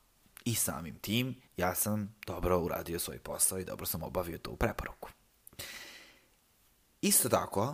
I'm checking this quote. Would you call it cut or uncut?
cut